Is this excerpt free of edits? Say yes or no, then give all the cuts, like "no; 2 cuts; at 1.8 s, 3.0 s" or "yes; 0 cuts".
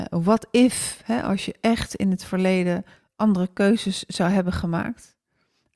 yes; 0 cuts